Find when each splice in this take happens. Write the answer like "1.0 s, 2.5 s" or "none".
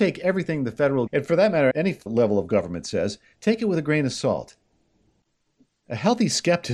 1.1 s, 1.7 s, 2.1 s